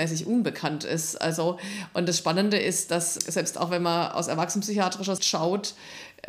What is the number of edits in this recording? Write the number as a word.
two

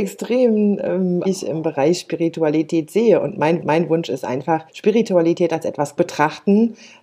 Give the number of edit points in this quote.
four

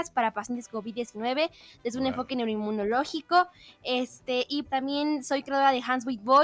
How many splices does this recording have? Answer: one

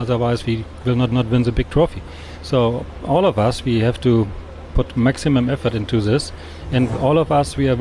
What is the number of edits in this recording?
one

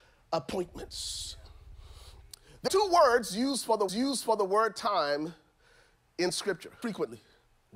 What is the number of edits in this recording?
three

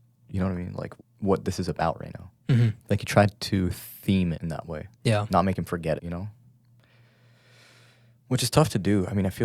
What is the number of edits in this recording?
five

